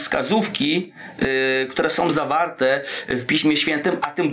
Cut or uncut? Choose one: uncut